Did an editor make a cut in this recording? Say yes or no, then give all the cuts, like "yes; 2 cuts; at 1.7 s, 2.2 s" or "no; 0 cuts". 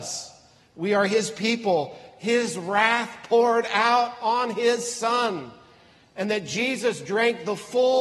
no; 0 cuts